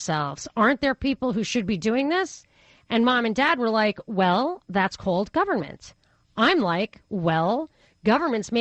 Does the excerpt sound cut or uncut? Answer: uncut